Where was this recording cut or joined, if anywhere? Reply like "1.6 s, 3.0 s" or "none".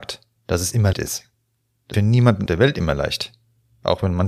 0.9 s, 1.9 s, 2.5 s